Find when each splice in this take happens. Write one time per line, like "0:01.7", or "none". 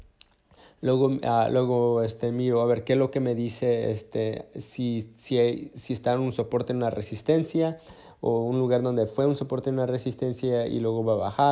none